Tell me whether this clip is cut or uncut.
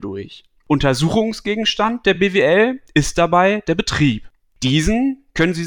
uncut